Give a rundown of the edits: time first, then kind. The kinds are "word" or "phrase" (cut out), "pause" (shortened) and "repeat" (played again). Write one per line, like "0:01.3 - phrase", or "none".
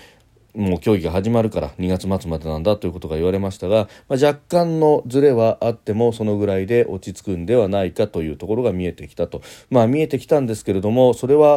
none